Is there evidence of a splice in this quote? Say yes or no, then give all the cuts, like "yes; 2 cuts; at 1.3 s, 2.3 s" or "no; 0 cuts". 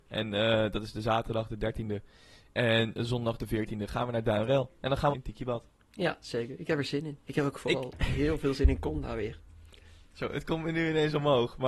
yes; 1 cut; at 5.1 s